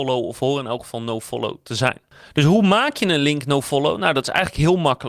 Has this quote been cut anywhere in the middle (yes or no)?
no